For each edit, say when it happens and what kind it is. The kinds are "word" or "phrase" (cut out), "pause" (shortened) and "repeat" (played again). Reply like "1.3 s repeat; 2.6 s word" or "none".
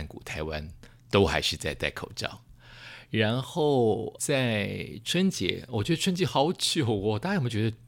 4.2 s word